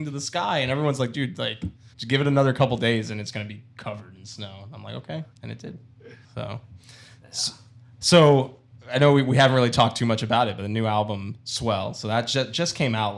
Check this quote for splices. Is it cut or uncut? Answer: cut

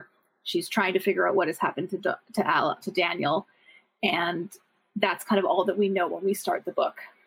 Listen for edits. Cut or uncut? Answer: cut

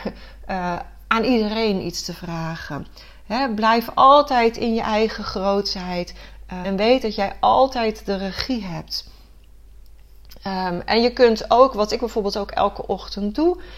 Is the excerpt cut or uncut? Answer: cut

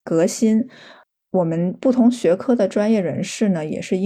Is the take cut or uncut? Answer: uncut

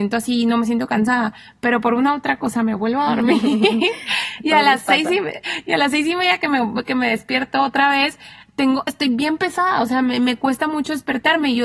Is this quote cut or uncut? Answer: uncut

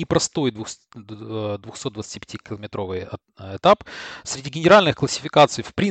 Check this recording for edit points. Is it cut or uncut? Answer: uncut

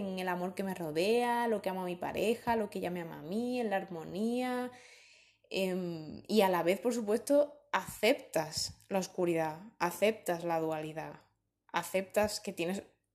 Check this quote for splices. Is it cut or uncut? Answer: uncut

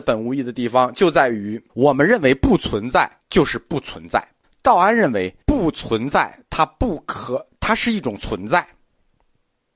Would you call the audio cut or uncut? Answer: cut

